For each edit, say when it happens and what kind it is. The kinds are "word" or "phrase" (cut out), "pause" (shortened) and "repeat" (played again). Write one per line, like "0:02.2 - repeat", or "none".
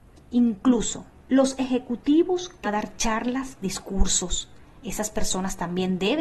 0:01.1 - pause
0:02.6 - word
0:03.6 - word